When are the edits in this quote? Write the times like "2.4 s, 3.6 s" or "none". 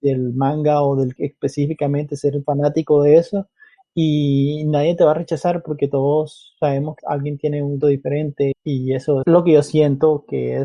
1.2 s, 2.4 s, 7.0 s, 7.8 s, 8.5 s, 9.2 s